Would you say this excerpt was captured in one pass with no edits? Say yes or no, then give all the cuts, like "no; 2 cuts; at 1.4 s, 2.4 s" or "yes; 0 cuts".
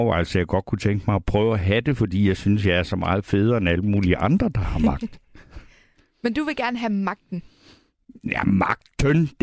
yes; 0 cuts